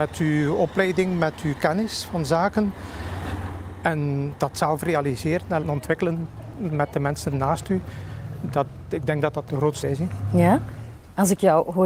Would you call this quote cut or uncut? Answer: cut